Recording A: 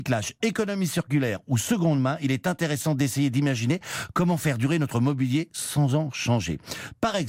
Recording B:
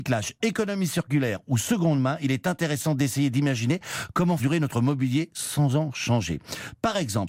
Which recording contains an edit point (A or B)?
B